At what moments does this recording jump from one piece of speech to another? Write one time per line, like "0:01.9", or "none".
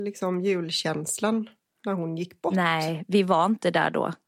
none